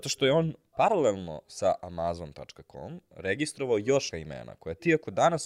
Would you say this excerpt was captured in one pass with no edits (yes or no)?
no